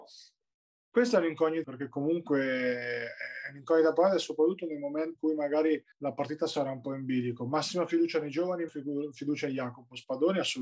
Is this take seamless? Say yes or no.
no